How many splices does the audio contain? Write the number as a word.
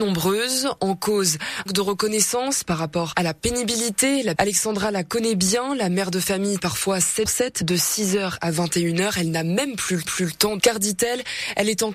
six